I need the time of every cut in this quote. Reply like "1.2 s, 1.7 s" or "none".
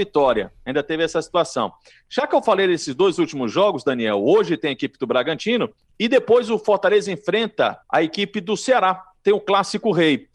5.8 s, 7.8 s